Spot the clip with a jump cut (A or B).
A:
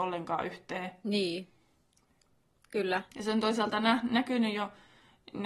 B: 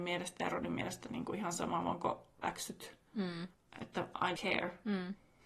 B